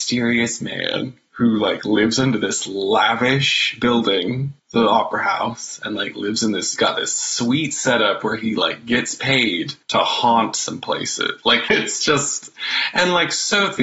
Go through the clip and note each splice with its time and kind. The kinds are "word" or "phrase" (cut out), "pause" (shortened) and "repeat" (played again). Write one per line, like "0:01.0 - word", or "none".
0:06.8 - word
0:09.8 - pause
0:11.7 - word